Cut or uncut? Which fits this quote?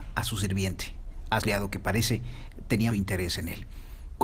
cut